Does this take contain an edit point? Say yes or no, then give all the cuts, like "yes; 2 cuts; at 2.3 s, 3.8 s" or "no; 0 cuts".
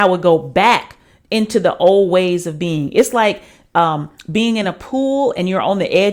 no; 0 cuts